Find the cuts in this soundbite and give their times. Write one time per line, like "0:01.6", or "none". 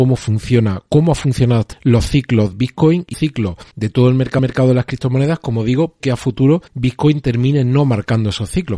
0:01.7
0:02.5
0:03.1
0:03.7
0:04.4
0:06.0
0:06.7

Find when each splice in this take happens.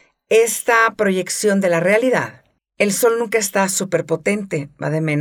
0:02.6

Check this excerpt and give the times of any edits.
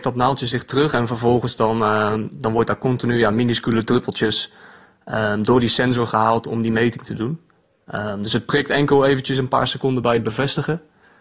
none

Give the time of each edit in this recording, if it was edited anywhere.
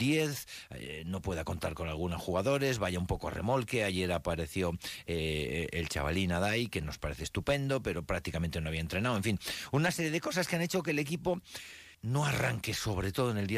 0:11.9

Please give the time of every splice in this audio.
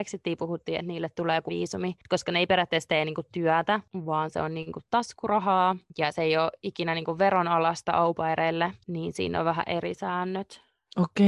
0:01.5

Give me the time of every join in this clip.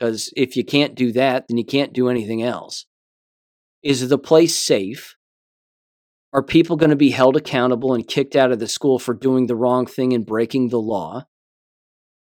none

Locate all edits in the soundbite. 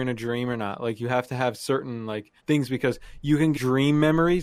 0:02.4
0:03.5

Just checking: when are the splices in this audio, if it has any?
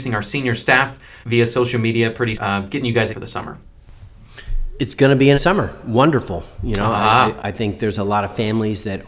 0:01.2
0:02.3
0:03.1
0:05.3
0:07.4

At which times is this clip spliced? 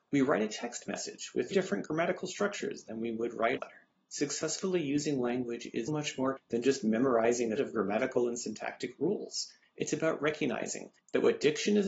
0:01.5
0:03.6
0:05.9
0:06.4
0:07.6
0:09.6

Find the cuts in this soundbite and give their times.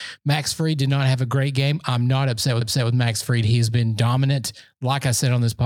0:02.6

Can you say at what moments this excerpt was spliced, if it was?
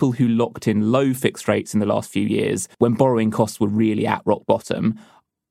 0:02.7

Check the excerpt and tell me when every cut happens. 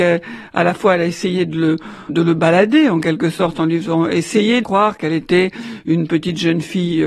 0:02.1
0:04.6

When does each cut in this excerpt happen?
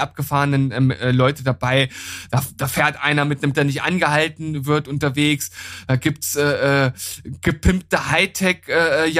0:03.5

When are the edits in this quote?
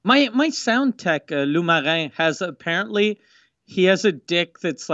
none

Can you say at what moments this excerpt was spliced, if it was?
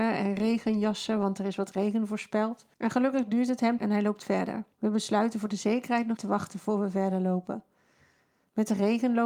0:02.7
0:03.8
0:04.7
0:06.2

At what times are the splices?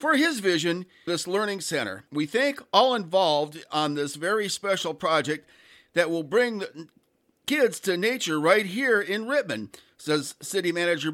0:01.1
0:02.1

